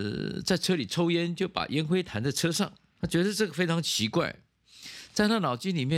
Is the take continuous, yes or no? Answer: no